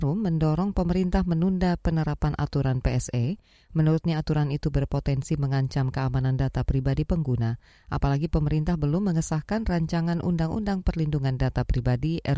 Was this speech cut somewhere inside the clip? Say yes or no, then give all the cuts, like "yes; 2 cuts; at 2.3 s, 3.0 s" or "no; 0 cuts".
no; 0 cuts